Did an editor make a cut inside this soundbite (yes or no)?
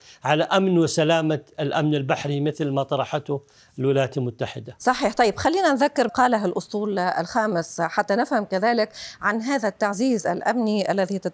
yes